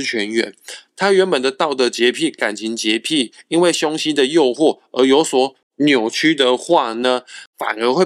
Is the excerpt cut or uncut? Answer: uncut